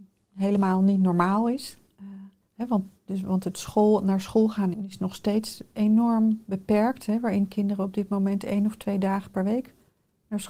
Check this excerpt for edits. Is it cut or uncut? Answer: cut